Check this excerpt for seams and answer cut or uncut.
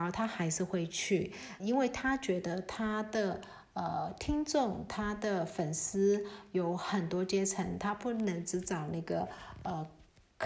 cut